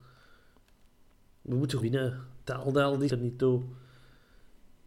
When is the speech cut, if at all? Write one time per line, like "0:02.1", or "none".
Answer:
0:01.8
0:02.4
0:03.1